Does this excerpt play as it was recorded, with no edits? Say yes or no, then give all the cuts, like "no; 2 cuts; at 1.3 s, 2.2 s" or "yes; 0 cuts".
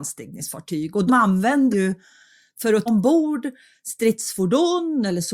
no; 3 cuts; at 1.1 s, 1.7 s, 2.9 s